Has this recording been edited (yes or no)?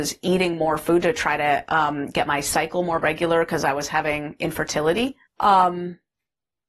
yes